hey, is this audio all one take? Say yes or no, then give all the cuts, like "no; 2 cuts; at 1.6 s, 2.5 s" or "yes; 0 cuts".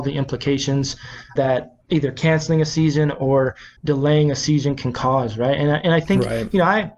no; 3 cuts; at 1.4 s, 1.8 s, 3.8 s